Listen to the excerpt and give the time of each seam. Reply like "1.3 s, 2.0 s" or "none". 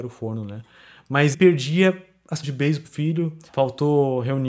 1.3 s, 2.4 s, 2.8 s, 3.5 s